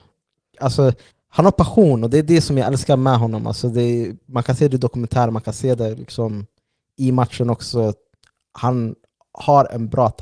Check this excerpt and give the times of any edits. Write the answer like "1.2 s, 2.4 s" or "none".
1.1 s